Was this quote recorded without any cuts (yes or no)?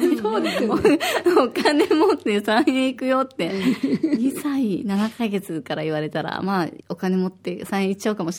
no